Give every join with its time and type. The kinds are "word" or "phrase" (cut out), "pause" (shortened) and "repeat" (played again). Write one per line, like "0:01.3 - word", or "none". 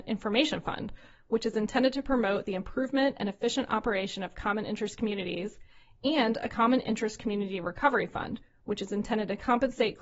none